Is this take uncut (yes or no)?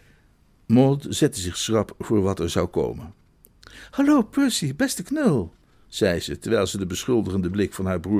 yes